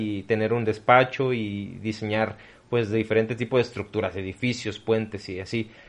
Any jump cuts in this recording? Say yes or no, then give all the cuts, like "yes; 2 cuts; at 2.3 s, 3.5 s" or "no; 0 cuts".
no; 0 cuts